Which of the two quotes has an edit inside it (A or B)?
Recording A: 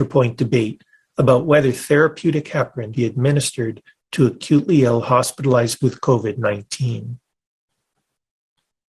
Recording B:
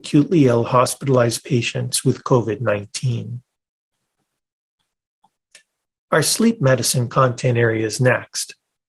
A